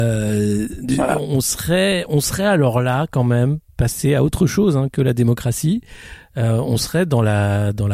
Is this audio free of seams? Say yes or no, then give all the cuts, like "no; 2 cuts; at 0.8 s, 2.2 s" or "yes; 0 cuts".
yes; 0 cuts